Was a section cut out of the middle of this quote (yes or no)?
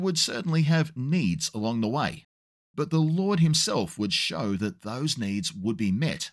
no